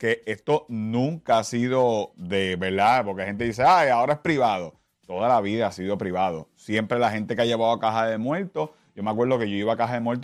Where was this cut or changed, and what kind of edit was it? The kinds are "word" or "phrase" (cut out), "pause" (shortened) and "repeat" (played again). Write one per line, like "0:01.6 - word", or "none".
none